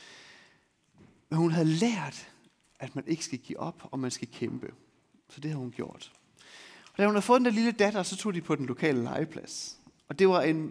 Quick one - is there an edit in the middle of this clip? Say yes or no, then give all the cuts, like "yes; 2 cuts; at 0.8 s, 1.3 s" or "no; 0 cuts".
no; 0 cuts